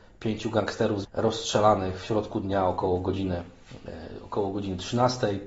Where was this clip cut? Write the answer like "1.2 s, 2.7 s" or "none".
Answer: 1.0 s